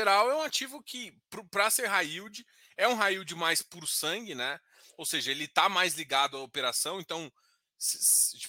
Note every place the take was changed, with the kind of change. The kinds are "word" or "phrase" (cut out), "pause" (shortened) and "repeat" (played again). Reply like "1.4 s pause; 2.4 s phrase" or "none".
none